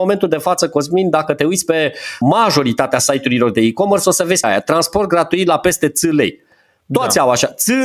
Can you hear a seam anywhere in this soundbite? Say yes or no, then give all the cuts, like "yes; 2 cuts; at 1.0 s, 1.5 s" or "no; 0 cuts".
yes; 2 cuts; at 2.2 s, 4.4 s